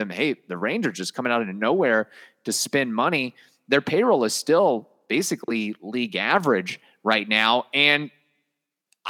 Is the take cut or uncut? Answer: uncut